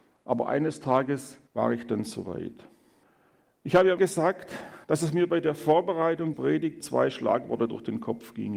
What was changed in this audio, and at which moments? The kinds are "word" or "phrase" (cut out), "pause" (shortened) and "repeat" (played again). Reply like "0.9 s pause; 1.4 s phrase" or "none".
1.5 s pause; 3.0 s pause; 4.0 s word; 4.8 s pause; 6.3 s word; 6.8 s word